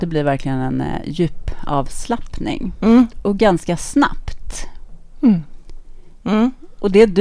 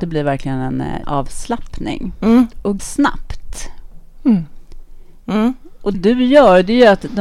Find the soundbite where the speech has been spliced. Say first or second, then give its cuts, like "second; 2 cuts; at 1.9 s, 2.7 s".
second; 3 cuts; at 1.0 s, 2.8 s, 5.9 s